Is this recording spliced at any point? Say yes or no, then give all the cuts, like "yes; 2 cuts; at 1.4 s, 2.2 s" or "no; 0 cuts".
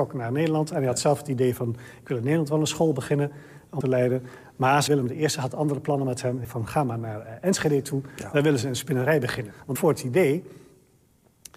yes; 4 cuts; at 3.8 s, 4.9 s, 6.4 s, 9.8 s